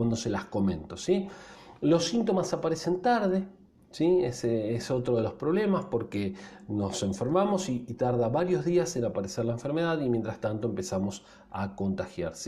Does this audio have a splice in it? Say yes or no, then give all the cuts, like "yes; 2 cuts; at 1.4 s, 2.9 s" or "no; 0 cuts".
no; 0 cuts